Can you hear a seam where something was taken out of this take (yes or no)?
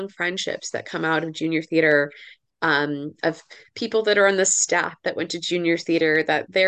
no